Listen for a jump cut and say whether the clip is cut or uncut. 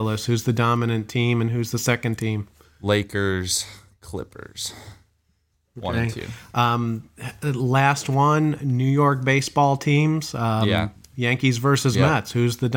uncut